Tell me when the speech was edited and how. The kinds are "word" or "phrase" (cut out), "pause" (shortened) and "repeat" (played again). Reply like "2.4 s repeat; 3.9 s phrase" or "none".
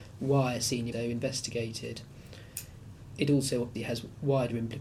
0.9 s phrase; 3.7 s word